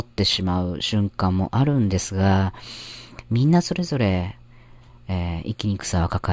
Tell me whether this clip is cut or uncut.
uncut